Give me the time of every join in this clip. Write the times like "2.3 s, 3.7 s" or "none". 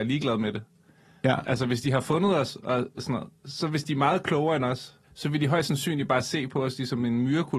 5.0 s